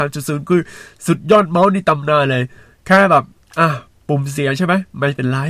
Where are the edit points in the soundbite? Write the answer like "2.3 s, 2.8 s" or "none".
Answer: none